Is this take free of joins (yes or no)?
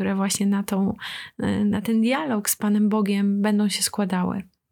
yes